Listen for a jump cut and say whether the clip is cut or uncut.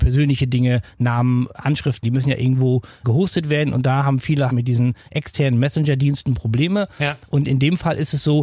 cut